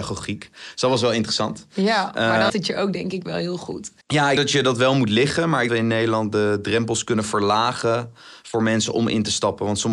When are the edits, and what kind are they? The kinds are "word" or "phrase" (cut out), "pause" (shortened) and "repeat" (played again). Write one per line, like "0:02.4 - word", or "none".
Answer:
0:02.5 - word
0:04.0 - pause
0:04.4 - word
0:05.7 - phrase